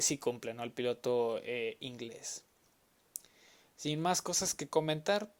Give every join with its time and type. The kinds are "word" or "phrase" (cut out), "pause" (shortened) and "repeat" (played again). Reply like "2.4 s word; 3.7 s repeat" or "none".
none